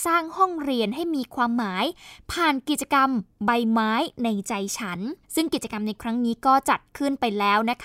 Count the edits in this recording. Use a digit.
1